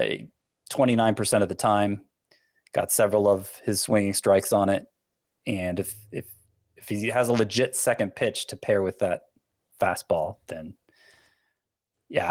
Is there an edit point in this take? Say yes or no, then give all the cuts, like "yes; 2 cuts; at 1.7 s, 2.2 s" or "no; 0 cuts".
no; 0 cuts